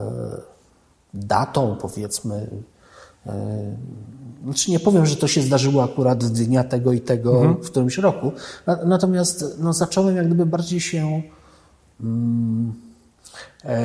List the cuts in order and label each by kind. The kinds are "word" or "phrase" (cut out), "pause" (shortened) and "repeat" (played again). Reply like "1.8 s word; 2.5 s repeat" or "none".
none